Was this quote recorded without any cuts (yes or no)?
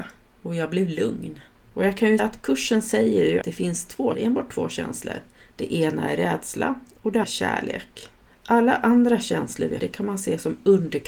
no